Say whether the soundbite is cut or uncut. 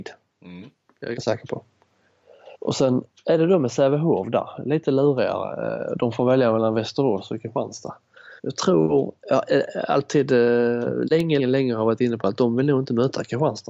cut